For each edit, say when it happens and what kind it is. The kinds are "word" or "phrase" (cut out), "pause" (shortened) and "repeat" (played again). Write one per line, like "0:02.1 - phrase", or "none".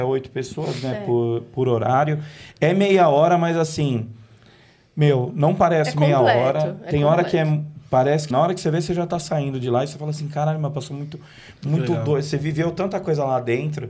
0:08.3 - word